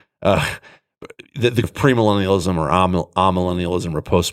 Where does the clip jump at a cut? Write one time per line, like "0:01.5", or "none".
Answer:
0:01.6